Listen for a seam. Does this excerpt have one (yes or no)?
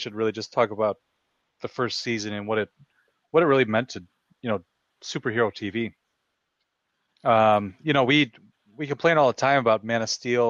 no